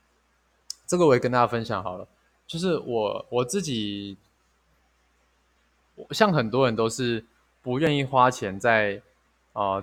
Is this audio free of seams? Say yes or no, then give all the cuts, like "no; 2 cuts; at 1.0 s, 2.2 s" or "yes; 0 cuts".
yes; 0 cuts